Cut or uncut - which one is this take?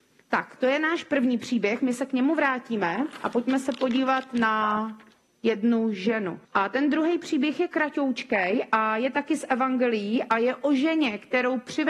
cut